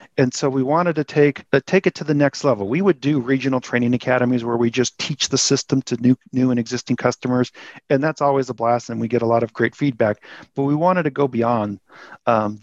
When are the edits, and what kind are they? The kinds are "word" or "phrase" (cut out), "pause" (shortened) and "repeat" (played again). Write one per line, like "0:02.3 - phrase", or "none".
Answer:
0:01.5 - pause